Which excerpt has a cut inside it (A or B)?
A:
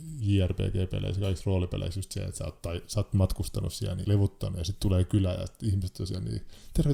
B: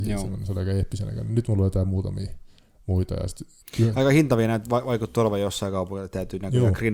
A